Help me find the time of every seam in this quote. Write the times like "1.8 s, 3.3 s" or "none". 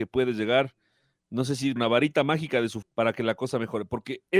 1.8 s, 2.8 s